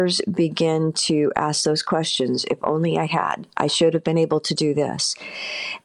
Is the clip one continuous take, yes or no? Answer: yes